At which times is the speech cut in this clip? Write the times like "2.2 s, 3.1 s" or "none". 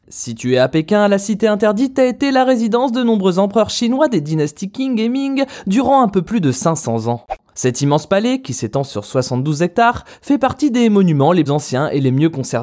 11.5 s